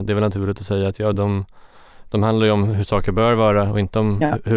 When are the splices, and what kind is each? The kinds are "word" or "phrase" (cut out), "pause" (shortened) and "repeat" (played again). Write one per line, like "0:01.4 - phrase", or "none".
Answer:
none